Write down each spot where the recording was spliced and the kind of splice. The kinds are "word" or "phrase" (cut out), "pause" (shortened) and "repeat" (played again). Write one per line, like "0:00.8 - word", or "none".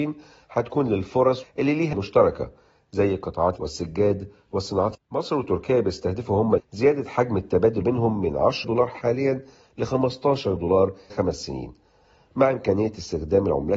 0:01.4 - word
0:01.9 - word
0:03.6 - word
0:04.9 - word
0:06.6 - word
0:07.8 - word
0:08.6 - word
0:10.6 - word
0:11.1 - word